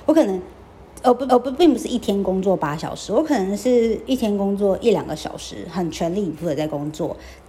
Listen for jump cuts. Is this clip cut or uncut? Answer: cut